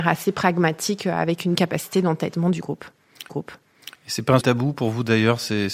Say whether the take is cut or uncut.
cut